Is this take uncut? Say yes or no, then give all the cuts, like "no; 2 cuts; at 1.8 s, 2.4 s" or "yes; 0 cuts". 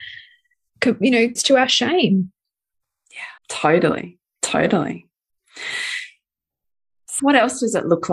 no; 3 cuts; at 1.4 s, 3.4 s, 7.2 s